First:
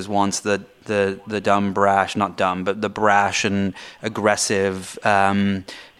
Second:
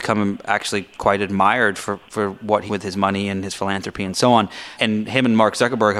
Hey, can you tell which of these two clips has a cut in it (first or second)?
second